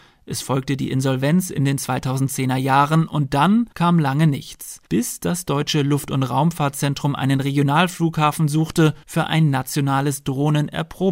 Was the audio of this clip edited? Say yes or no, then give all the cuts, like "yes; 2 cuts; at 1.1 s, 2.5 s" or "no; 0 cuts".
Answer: yes; 3 cuts; at 3.7 s, 4.9 s, 9.0 s